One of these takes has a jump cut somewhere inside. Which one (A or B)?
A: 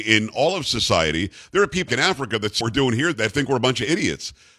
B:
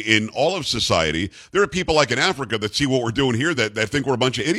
A